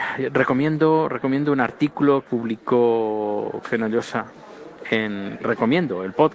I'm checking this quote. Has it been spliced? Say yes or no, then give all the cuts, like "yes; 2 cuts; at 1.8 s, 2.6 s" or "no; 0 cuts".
yes; 3 cuts; at 2.2 s, 3.6 s, 5.4 s